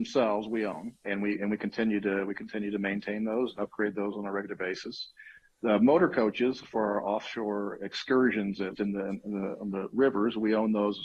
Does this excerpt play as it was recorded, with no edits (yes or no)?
no